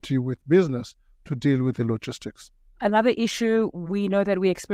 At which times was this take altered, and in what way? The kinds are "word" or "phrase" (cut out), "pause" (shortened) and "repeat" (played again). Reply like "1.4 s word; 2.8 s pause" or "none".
none